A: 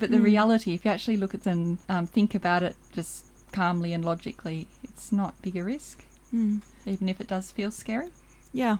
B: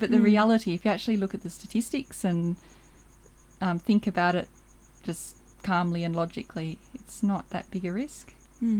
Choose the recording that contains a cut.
A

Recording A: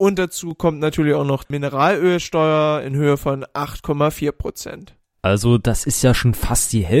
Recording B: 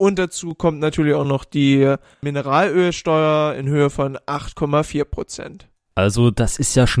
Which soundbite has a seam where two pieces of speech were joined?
A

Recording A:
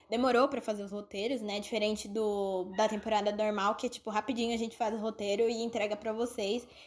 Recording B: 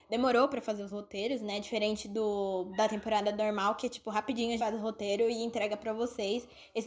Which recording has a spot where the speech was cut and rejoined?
B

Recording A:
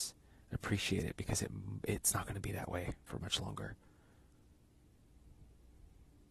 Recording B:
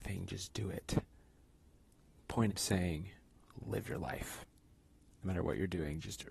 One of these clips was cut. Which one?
B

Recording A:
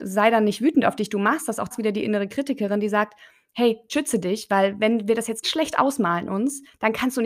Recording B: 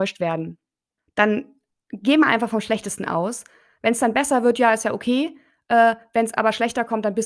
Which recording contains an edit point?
A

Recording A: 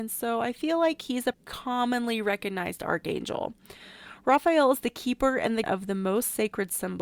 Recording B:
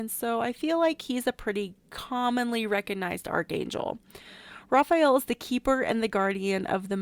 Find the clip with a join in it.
A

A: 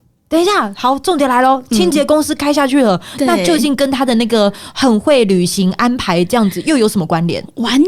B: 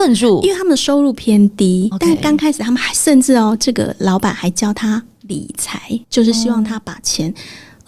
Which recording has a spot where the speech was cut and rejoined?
B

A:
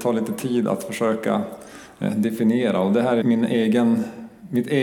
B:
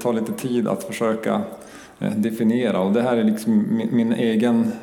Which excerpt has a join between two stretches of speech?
A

